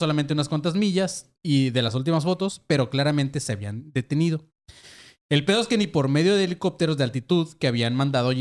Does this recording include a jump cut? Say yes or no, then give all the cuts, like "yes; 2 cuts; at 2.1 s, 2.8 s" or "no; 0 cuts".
no; 0 cuts